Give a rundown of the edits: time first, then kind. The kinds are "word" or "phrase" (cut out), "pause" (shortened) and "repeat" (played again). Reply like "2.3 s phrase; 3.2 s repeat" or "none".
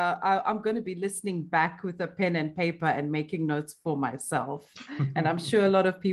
none